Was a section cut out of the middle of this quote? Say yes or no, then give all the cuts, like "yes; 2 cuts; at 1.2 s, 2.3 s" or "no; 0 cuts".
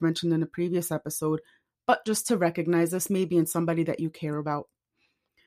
no; 0 cuts